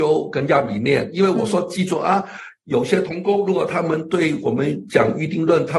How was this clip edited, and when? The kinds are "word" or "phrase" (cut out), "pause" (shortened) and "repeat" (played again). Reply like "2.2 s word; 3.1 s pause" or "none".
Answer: none